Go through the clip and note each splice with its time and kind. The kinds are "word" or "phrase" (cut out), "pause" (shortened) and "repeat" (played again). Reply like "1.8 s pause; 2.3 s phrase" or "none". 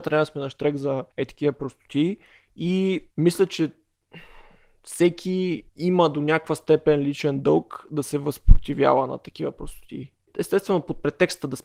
1.1 s pause; 3.1 s pause; 5.7 s pause